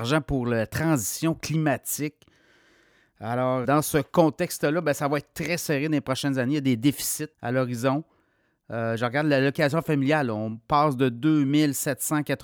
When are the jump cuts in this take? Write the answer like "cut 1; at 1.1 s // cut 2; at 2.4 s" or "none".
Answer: cut 1; at 3.6 s // cut 2; at 7.3 s